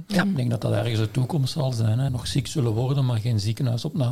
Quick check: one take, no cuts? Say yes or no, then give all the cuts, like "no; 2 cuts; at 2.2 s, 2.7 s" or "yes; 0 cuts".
no; 1 cut; at 2.1 s